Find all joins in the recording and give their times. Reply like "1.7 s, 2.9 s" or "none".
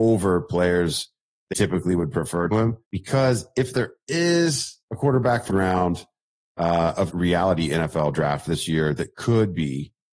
1.5 s, 2.5 s, 2.8 s, 4.8 s, 5.5 s, 7.1 s